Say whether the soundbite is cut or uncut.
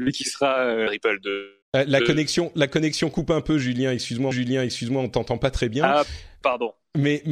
cut